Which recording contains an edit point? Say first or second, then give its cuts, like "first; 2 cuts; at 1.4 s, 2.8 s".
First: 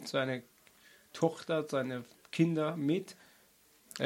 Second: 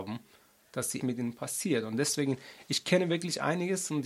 second; 1 cut; at 1.0 s